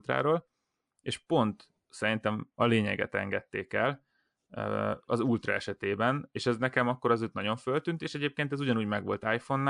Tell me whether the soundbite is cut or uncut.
uncut